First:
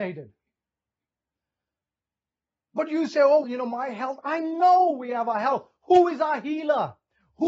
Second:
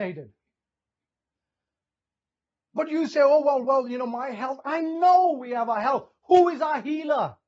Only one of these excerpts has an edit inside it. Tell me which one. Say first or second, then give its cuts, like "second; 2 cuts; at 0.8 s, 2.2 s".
first; 1 cut; at 3.4 s